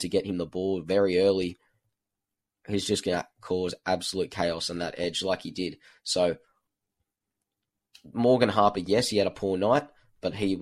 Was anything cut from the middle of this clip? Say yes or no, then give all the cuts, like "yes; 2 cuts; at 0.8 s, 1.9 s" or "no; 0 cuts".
no; 0 cuts